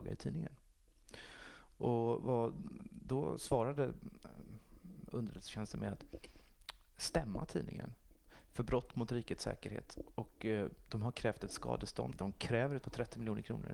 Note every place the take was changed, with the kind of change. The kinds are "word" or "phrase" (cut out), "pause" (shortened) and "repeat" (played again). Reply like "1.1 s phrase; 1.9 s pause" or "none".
12.1 s word; 12.8 s word